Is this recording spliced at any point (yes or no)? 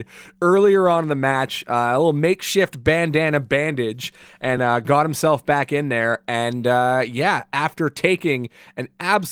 no